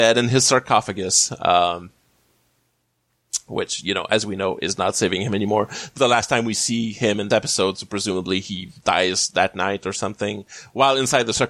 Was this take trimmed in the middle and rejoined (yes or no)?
yes